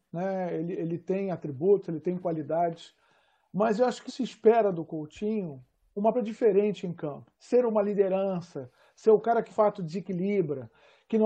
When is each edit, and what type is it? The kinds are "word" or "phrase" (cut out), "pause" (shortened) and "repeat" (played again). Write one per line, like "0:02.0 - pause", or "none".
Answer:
0:04.1 - word
0:06.1 - word
0:07.3 - pause
0:09.5 - word

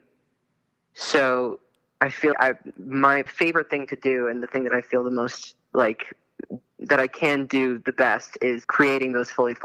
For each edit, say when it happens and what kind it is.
0:02.3 - word
0:03.3 - word
0:08.6 - word

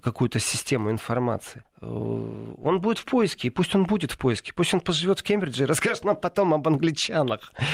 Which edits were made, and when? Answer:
0:01.6 - pause

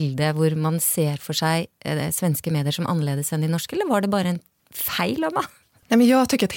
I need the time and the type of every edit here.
none

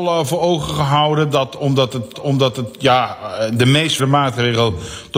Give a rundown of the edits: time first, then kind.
0:02.1 - repeat
0:04.0 - word

